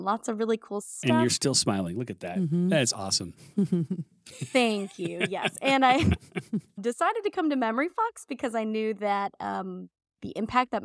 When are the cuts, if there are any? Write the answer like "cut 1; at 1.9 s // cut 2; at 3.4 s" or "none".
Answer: none